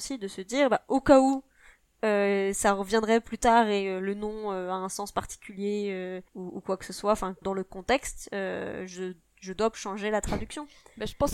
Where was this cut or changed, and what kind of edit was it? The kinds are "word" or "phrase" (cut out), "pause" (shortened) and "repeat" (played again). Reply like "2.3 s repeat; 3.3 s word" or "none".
6.3 s pause; 7.4 s word; 9.7 s word